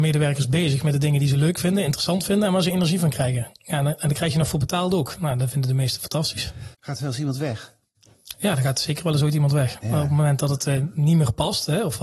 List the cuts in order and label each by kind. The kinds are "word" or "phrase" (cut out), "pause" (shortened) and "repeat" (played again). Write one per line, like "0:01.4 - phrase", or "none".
0:06.7 - pause